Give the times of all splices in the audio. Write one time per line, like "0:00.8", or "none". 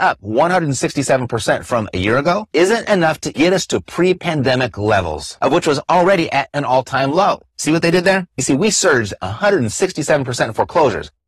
0:03.3